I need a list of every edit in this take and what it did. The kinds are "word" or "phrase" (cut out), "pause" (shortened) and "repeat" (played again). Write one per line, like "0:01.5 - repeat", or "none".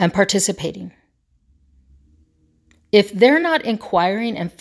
none